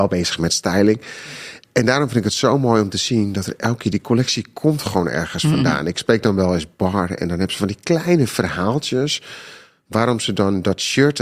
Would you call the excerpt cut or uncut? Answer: uncut